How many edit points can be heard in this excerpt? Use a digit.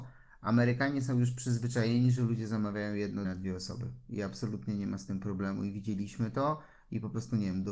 1